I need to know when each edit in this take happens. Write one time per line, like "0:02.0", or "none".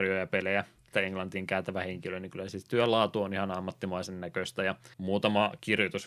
0:00.9
0:04.9